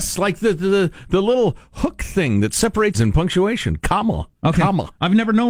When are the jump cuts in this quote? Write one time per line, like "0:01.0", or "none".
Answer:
0:02.9